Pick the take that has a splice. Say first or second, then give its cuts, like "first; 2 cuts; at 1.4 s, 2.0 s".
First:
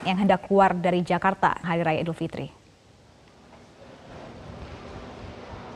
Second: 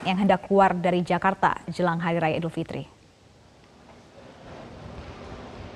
first; 1 cut; at 1.6 s